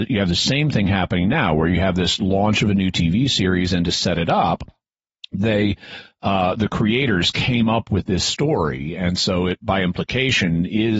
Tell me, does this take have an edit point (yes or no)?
no